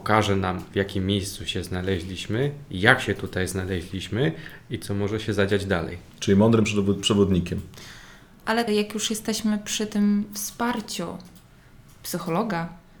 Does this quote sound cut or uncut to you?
cut